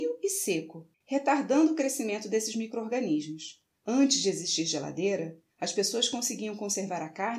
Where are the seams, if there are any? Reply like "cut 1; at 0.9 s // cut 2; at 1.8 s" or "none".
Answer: cut 1; at 0.9 s // cut 2; at 3.7 s // cut 3; at 5.5 s